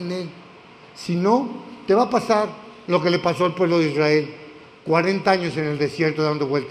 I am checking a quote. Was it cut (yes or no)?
no